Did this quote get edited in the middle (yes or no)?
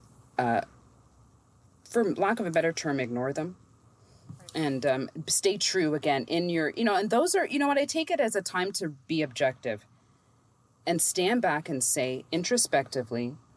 no